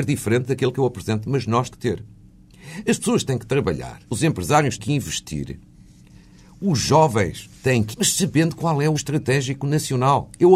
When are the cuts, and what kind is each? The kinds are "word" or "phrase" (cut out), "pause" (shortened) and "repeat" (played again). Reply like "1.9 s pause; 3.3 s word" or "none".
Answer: 1.7 s word; 4.1 s pause; 4.8 s word; 7.6 s pause; 7.9 s word; 8.9 s word